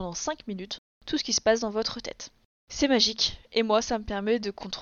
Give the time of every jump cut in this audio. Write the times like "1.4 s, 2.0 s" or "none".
none